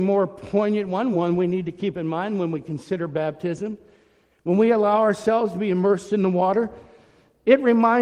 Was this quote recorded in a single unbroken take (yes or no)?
yes